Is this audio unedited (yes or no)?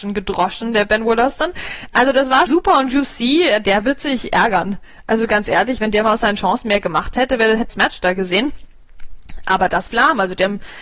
no